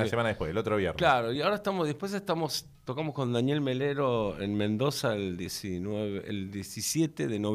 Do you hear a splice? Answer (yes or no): no